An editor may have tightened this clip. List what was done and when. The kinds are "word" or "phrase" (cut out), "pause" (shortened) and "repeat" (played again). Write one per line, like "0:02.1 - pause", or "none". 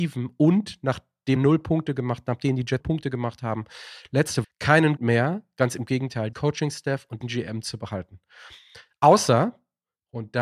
0:01.4 - word
0:02.8 - word
0:04.4 - word
0:05.0 - word
0:06.3 - word
0:07.2 - word